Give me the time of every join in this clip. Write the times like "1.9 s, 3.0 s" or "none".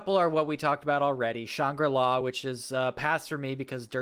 none